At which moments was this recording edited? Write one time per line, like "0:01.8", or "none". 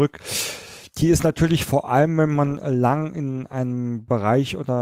none